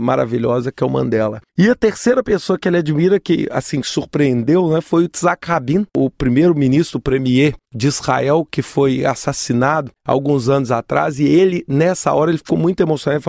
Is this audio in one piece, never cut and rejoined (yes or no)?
no